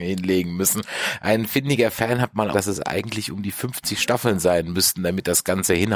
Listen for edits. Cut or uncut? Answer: cut